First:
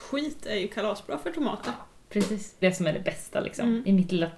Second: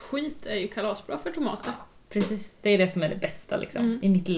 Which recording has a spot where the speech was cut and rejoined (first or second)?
first